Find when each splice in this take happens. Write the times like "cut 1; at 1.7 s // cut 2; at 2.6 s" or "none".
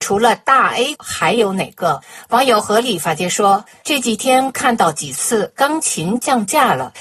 cut 1; at 1.0 s